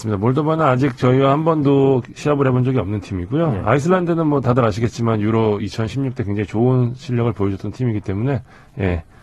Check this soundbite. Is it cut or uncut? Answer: uncut